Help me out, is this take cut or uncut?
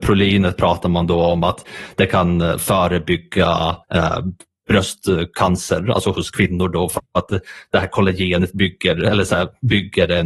cut